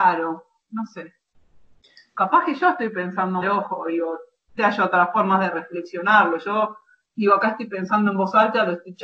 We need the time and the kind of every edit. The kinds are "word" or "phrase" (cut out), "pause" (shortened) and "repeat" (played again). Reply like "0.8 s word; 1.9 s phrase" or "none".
3.4 s word; 4.6 s word